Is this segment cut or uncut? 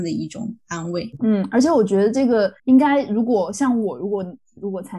cut